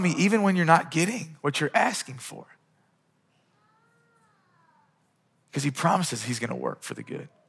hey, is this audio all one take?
yes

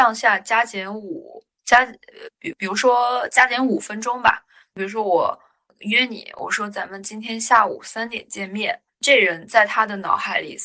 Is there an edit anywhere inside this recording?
yes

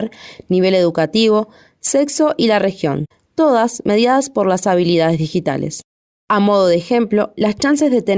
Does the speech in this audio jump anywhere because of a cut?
no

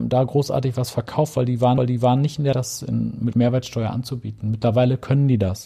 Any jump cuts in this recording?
yes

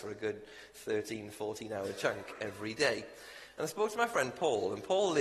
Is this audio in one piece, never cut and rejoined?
yes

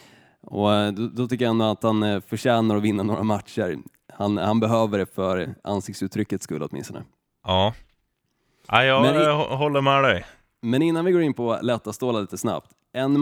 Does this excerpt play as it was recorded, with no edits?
yes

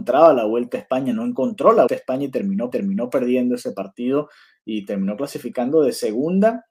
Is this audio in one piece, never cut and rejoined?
no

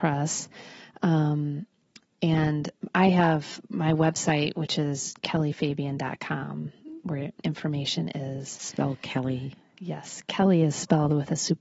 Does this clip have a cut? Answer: yes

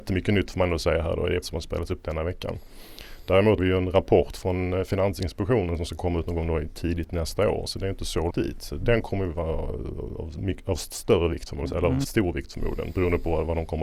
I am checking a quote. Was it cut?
yes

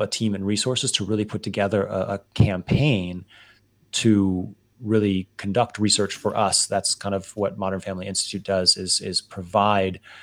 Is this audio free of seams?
yes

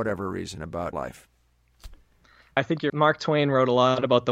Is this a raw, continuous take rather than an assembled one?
no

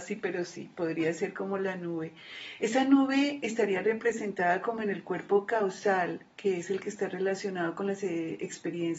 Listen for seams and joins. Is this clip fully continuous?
yes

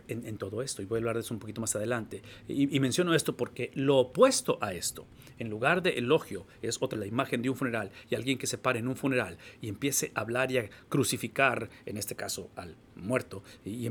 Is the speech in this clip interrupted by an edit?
yes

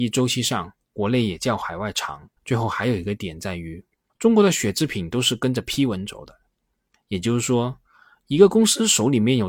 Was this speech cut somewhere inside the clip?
yes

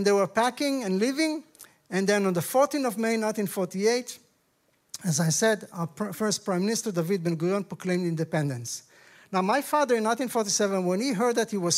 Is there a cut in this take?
no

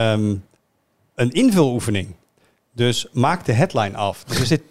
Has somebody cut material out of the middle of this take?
no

